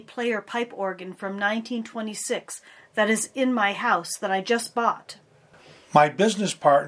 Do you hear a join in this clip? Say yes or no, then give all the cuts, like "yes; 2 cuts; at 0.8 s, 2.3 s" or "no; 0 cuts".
no; 0 cuts